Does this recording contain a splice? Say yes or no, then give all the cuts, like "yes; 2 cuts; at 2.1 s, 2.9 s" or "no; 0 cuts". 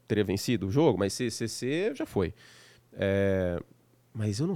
yes; 1 cut; at 1.1 s